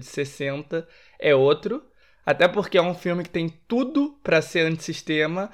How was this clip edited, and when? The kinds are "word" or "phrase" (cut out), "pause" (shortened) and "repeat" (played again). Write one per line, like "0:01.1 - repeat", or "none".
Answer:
none